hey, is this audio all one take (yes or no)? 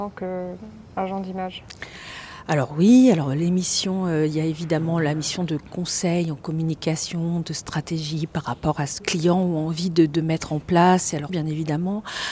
no